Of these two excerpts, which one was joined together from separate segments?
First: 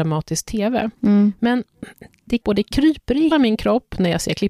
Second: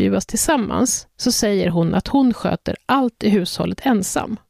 first; 3 cuts; at 0.9 s, 2.4 s, 3.3 s

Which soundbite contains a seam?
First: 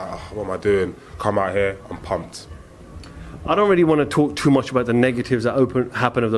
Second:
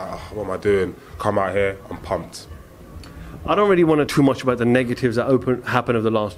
second; 1 cut; at 4.1 s

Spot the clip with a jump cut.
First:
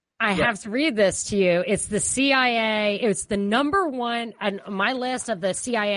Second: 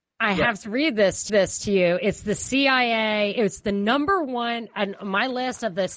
second; 1 cut; at 1.3 s

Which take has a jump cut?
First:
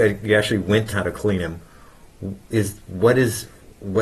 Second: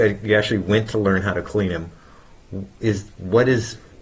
first; 1 cut; at 0.9 s

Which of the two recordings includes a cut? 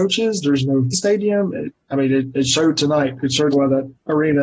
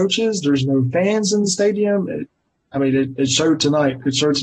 first; 3 cuts; at 0.9 s, 1.8 s, 3.5 s

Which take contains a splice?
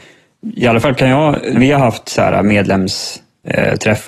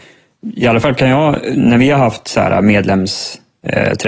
first; 1 cut; at 1.5 s

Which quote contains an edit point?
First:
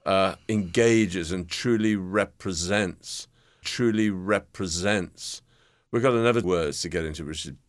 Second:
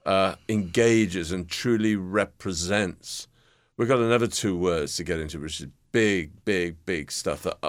first; 2 cuts; at 3.6 s, 6.4 s

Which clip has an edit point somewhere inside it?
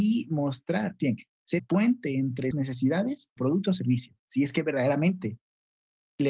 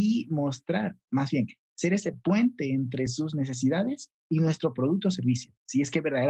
first; 4 cuts; at 1.0 s, 1.6 s, 2.5 s, 3.4 s

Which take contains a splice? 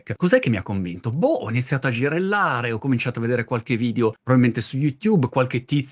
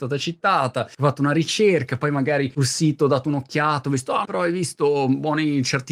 second; 1 cut; at 4.2 s

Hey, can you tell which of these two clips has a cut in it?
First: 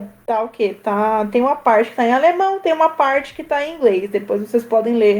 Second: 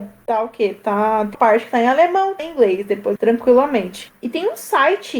second; 3 cuts; at 1.3 s, 2.4 s, 3.2 s

